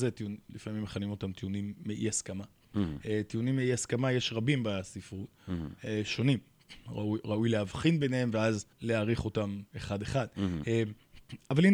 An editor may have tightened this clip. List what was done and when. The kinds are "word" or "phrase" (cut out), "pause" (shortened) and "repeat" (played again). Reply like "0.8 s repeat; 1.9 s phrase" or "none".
8.7 s pause; 9.7 s pause